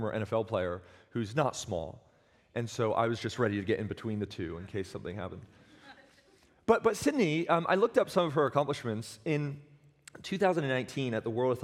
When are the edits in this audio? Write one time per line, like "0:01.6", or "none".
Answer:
none